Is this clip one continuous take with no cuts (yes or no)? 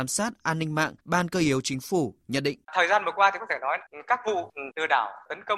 no